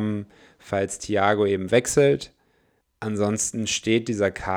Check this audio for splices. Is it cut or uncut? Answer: uncut